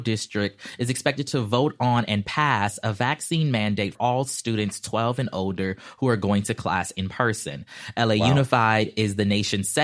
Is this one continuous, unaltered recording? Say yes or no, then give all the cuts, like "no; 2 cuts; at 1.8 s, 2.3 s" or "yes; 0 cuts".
no; 1 cut; at 3.9 s